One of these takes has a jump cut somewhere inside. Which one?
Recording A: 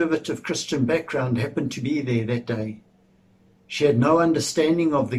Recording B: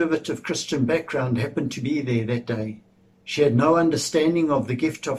B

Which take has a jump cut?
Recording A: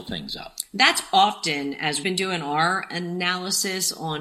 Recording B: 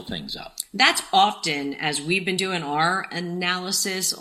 A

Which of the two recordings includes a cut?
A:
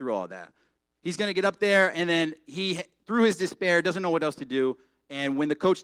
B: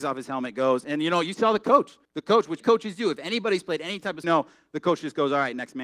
B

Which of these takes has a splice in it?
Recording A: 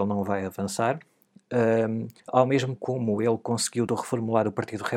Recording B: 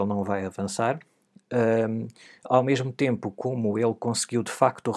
A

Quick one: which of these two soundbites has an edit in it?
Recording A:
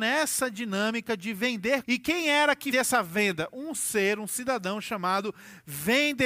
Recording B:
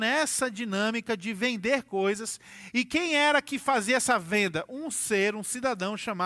A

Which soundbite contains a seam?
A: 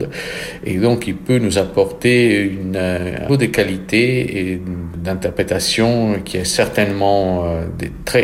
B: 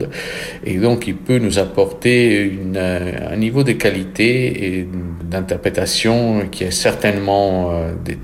A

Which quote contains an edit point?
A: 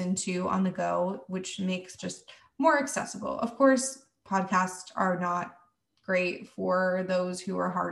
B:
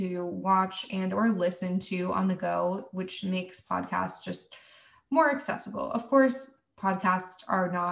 A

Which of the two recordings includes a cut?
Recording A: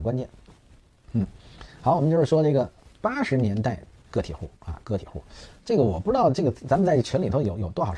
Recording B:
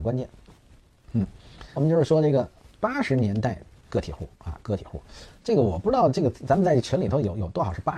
B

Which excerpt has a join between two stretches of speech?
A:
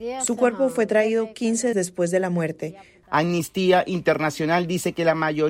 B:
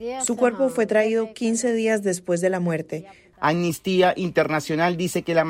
A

